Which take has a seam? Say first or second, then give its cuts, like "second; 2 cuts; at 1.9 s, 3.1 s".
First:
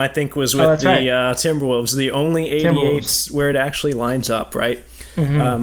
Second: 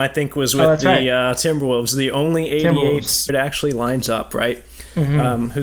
second; 1 cut; at 3.3 s